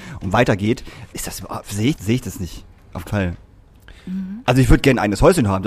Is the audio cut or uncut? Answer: cut